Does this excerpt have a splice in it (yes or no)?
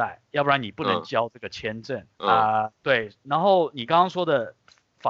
yes